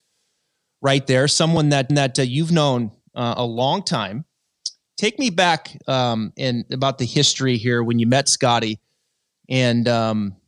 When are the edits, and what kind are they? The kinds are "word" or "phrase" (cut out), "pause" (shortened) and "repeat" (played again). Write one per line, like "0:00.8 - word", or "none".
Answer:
0:01.9 - repeat